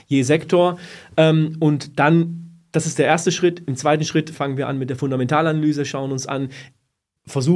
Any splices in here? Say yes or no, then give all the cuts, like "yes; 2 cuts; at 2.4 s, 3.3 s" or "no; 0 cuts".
no; 0 cuts